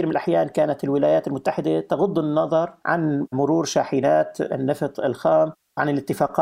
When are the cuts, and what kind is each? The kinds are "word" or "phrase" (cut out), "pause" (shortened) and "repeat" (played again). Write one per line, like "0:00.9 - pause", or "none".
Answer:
none